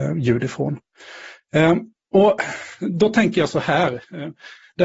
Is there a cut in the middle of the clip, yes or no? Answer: no